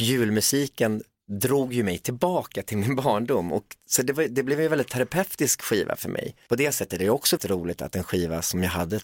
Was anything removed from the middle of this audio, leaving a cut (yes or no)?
yes